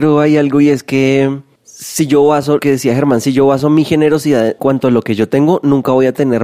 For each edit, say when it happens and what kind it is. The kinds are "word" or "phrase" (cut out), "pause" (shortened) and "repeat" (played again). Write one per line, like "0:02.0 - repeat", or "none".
0:02.6 - word
0:04.6 - word